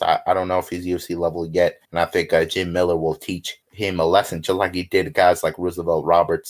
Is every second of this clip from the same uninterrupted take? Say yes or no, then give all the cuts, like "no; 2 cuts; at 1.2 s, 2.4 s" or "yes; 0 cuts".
no; 2 cuts; at 1.8 s, 3.6 s